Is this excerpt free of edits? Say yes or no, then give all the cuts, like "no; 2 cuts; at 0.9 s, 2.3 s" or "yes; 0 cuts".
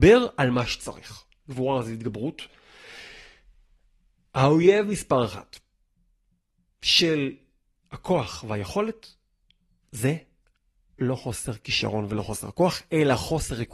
yes; 0 cuts